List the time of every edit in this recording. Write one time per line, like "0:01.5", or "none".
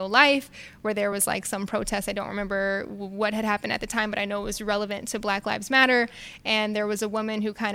none